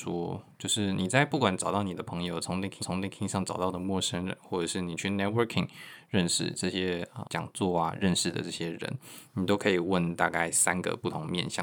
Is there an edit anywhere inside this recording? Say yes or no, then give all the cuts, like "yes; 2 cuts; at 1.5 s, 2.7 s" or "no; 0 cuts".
yes; 2 cuts; at 2.8 s, 7.2 s